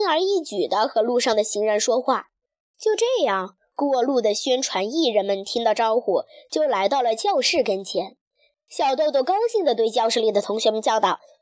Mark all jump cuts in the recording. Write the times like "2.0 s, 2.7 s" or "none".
none